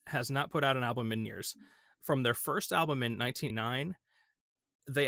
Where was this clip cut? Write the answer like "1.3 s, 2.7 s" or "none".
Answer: 1.3 s, 3.5 s